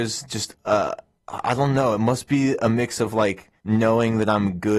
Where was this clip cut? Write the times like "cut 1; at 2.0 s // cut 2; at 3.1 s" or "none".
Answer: cut 1; at 1.2 s // cut 2; at 3.6 s